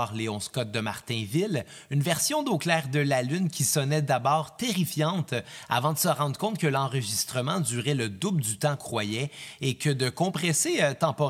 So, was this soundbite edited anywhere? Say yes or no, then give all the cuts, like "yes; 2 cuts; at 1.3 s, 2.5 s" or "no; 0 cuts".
yes; 1 cut; at 8.8 s